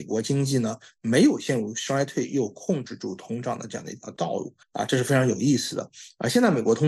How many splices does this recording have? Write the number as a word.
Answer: one